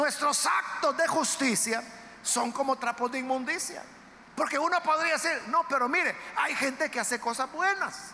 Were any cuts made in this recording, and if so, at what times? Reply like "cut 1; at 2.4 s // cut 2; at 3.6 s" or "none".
cut 1; at 4.3 s